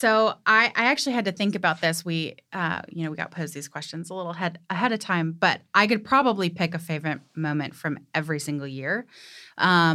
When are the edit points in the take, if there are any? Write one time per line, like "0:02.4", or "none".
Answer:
none